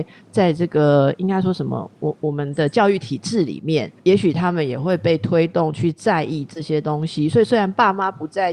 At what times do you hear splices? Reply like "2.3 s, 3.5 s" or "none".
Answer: 4.0 s